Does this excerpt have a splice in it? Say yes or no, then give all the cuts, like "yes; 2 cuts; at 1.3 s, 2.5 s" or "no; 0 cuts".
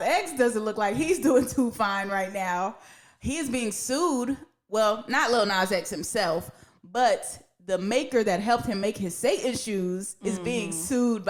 no; 0 cuts